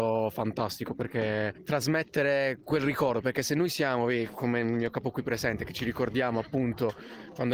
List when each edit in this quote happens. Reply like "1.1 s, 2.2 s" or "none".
2.6 s